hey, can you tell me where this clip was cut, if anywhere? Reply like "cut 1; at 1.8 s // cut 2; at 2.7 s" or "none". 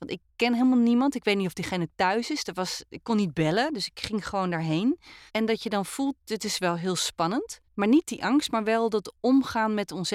cut 1; at 5.3 s // cut 2; at 7.6 s